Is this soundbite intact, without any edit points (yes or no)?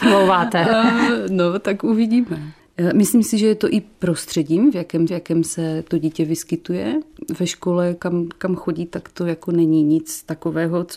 no